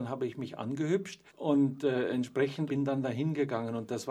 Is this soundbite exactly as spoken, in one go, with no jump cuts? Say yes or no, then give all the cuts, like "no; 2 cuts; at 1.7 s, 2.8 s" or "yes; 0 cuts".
no; 2 cuts; at 1.3 s, 2.7 s